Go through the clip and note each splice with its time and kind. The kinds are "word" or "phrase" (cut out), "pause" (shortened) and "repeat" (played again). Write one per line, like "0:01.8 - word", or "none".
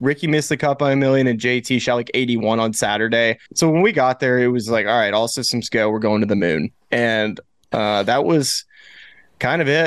0:03.5 - pause